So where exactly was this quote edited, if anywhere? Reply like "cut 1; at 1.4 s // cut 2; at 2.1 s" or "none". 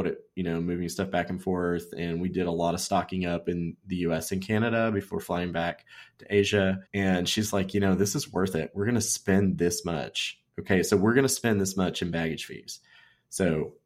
cut 1; at 6.9 s // cut 2; at 10.5 s

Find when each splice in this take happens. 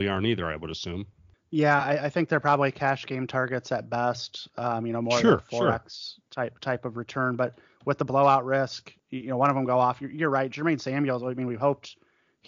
none

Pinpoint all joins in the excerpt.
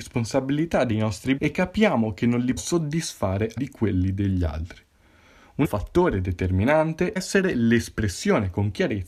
cut 1; at 1.4 s // cut 2; at 2.6 s // cut 3; at 3.6 s // cut 4; at 5.6 s // cut 5; at 7.2 s

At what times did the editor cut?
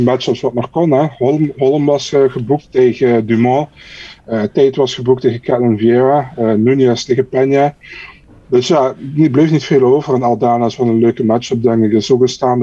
none

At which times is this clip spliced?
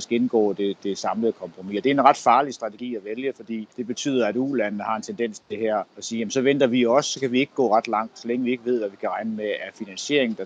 cut 1; at 3.7 s // cut 2; at 5.9 s

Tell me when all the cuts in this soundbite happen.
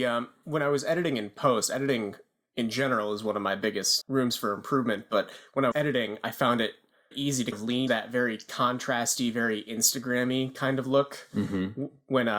cut 1; at 4.0 s // cut 2; at 5.7 s // cut 3; at 7.1 s // cut 4; at 7.5 s // cut 5; at 7.9 s

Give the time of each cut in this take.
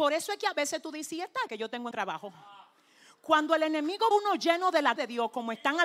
cut 1; at 1.5 s // cut 2; at 1.9 s // cut 3; at 4.1 s // cut 4; at 5.0 s

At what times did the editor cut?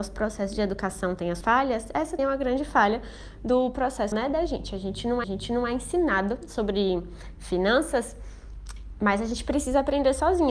cut 1; at 1.4 s // cut 2; at 2.2 s // cut 3; at 4.1 s // cut 4; at 5.2 s

